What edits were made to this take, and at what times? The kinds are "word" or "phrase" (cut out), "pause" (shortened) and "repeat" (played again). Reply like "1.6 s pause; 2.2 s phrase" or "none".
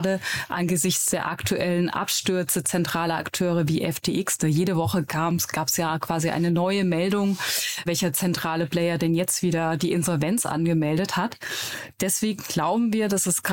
7.9 s word

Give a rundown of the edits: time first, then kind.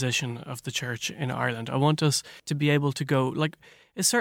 2.4 s pause

